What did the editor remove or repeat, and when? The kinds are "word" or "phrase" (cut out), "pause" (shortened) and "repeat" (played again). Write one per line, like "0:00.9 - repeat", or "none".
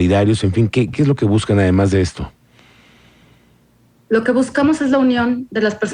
0:00.9 - word